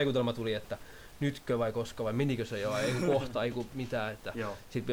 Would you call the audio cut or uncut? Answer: uncut